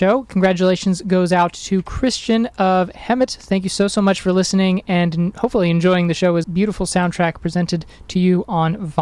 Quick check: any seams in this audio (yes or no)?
yes